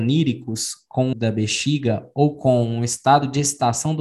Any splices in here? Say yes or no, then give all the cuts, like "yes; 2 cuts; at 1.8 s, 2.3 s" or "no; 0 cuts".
yes; 1 cut; at 1.1 s